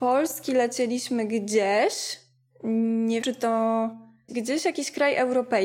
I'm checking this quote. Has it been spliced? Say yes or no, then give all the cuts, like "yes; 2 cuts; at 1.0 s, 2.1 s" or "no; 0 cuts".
yes; 2 cuts; at 3.2 s, 4.3 s